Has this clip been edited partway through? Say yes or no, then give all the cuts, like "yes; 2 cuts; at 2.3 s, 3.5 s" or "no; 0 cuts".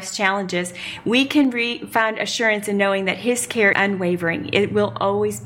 yes; 1 cut; at 3.7 s